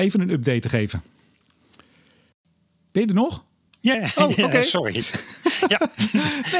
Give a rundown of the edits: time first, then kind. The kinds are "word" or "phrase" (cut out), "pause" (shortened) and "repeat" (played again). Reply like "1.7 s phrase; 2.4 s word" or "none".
3.9 s word